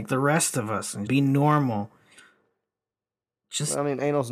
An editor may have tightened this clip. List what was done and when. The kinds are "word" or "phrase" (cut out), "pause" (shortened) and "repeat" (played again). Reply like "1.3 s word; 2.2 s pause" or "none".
1.1 s word